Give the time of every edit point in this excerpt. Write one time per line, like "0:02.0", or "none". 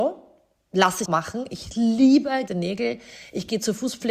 0:01.1
0:02.5